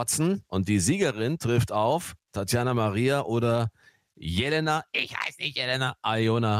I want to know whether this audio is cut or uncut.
uncut